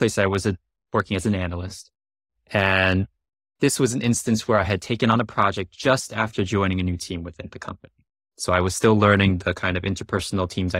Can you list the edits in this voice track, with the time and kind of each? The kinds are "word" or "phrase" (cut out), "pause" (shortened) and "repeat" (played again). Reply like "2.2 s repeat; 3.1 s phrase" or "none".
3.3 s pause